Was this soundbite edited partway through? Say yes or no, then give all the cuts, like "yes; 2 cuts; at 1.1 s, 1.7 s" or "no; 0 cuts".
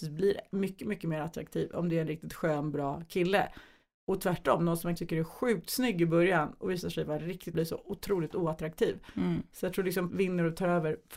yes; 3 cuts; at 5.0 s, 7.5 s, 10.1 s